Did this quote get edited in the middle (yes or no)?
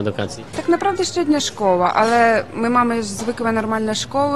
no